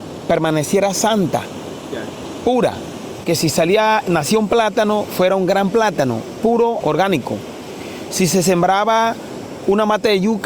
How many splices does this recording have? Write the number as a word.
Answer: two